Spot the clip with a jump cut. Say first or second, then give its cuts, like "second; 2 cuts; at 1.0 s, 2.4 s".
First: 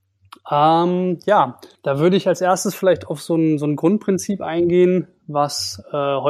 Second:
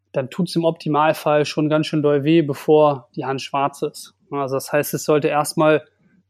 first; 1 cut; at 1.7 s